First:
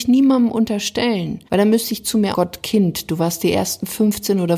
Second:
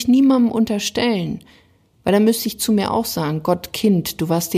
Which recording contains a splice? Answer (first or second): first